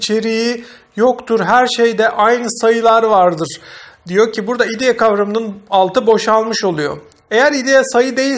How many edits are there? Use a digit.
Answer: 0